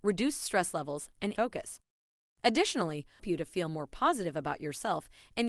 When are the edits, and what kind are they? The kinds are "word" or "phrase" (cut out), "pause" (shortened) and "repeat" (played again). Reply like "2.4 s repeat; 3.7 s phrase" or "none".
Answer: 1.4 s word; 3.2 s phrase